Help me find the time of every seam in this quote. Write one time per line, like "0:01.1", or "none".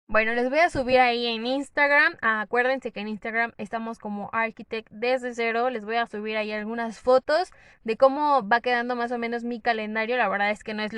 none